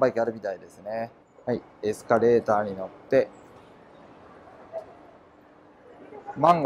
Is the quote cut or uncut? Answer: cut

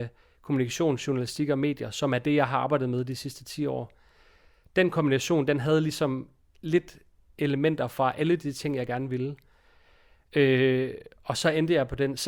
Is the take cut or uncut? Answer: uncut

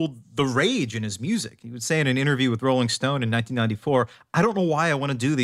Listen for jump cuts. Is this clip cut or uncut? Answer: uncut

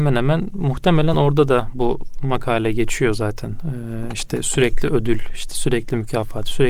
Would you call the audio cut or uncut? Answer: uncut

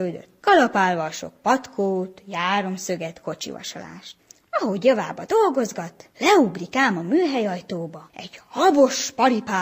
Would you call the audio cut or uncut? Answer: uncut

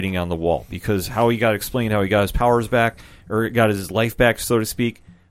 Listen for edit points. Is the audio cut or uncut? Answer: uncut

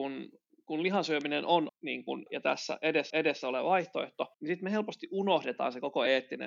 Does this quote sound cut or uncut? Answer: cut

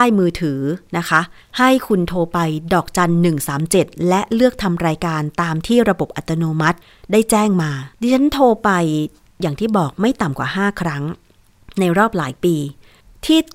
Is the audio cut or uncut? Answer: cut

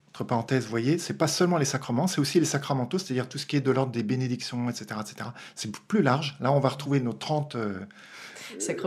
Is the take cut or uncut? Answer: uncut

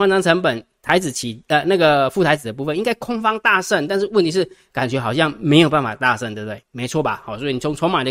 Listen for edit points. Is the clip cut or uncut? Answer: cut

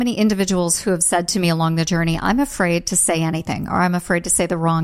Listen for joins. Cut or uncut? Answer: uncut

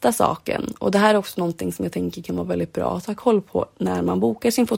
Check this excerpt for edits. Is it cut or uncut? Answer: uncut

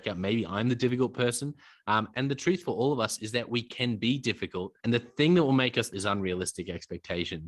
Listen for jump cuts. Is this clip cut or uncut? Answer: cut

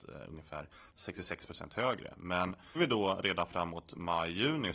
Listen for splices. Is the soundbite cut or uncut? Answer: cut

